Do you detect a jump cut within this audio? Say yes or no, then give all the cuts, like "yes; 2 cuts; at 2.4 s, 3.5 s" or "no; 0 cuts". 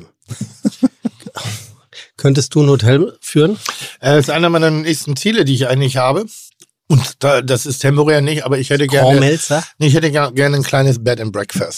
yes; 1 cut; at 6.5 s